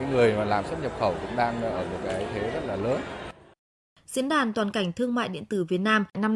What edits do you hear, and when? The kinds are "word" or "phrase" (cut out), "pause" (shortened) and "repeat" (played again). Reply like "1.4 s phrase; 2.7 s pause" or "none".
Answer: none